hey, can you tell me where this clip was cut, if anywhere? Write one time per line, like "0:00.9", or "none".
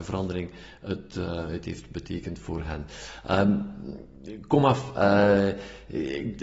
none